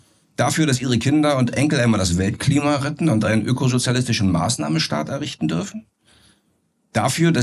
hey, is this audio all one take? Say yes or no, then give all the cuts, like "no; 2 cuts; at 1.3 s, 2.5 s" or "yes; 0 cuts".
yes; 0 cuts